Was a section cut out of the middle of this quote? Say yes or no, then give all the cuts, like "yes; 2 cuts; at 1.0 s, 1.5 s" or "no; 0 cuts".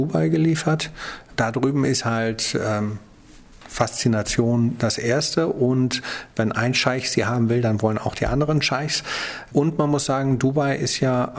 no; 0 cuts